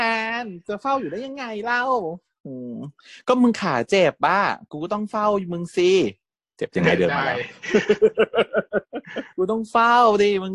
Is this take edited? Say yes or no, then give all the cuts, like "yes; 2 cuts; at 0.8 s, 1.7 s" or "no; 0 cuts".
yes; 1 cut; at 9.3 s